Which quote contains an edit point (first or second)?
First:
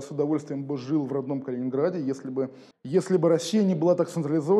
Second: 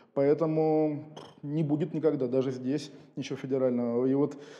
first